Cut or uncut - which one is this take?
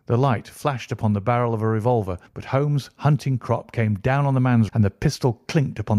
cut